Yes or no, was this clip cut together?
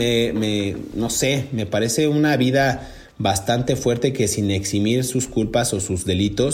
no